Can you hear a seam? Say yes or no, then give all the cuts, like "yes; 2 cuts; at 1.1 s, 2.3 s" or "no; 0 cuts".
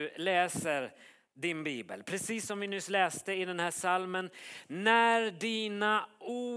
no; 0 cuts